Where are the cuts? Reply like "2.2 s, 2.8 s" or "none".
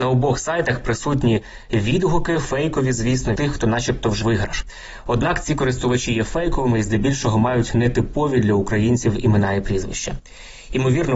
3.4 s, 4.2 s, 6.1 s